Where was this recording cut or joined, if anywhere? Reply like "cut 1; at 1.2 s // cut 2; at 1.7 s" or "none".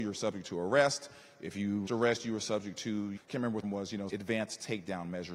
cut 1; at 1.9 s // cut 2; at 3.2 s // cut 3; at 3.6 s // cut 4; at 4.1 s